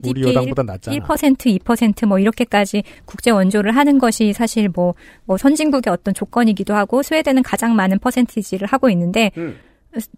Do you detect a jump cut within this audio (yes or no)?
no